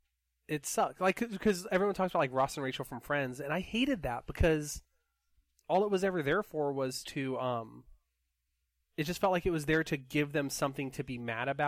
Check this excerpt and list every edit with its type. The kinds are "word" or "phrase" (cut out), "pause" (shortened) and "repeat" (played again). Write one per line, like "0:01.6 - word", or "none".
none